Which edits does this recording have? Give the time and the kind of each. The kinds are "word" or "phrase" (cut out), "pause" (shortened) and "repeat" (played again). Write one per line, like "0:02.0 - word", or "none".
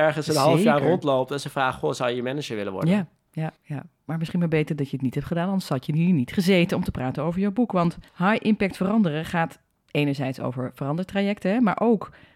0:03.6 - pause
0:08.1 - pause